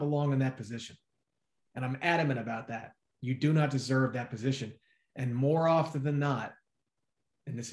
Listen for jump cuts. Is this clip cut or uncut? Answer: uncut